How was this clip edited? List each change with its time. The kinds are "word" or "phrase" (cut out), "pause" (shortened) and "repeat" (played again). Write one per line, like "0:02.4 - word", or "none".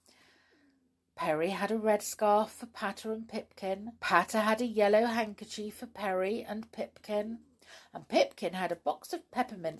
0:04.0 - pause